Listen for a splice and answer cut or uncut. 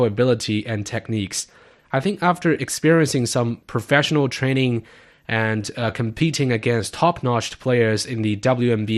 uncut